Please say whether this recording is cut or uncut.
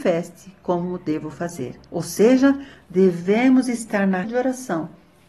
cut